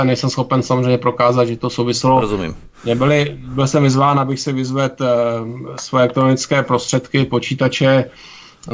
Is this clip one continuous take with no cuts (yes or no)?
yes